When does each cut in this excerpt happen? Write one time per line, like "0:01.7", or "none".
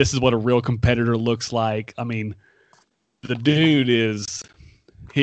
none